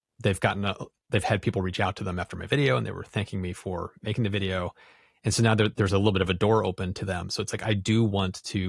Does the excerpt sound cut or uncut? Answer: uncut